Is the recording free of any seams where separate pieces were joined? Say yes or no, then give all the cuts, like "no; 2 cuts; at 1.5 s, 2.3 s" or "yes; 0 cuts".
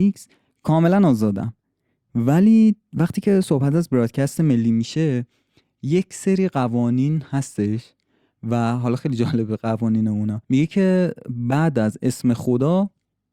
no; 1 cut; at 10.4 s